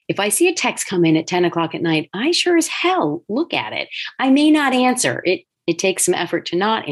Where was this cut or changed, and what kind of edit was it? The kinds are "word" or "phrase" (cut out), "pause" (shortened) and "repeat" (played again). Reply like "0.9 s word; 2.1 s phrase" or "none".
none